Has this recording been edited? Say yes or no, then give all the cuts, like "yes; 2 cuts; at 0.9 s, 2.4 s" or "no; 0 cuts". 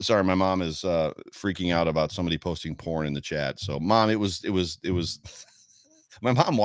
no; 0 cuts